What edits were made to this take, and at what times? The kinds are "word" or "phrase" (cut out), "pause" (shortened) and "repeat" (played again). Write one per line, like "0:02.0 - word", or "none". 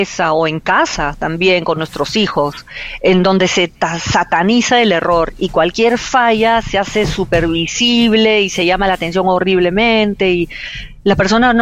none